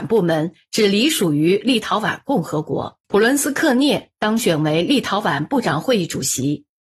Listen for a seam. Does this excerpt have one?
yes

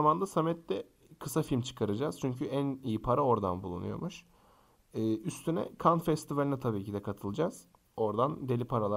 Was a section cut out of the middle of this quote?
no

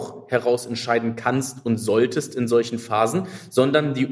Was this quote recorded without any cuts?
yes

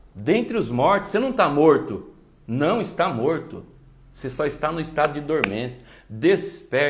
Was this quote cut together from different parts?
no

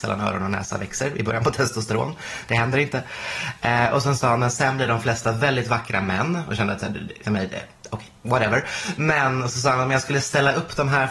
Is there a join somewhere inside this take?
yes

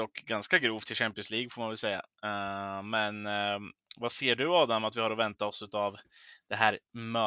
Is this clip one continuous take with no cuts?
yes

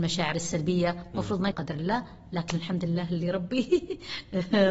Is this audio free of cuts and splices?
no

